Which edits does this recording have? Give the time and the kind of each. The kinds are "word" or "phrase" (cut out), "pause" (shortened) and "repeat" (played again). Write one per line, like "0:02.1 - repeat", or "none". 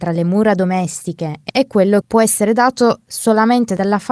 0:01.5 - word
0:02.0 - word